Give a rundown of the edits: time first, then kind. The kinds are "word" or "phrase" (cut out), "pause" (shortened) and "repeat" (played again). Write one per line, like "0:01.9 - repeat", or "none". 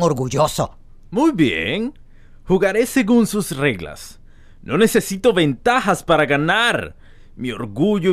none